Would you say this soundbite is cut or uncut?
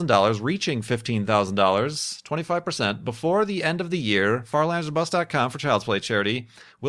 uncut